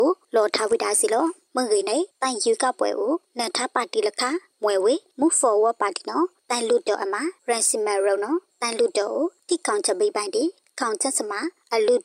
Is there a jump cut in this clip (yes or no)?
no